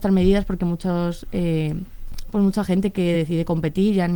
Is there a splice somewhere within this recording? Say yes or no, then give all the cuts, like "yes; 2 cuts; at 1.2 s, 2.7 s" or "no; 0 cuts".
no; 0 cuts